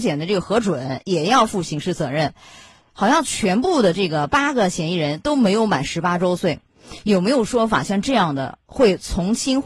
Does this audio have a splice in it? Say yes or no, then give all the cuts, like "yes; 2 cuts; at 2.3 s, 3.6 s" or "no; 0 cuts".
no; 0 cuts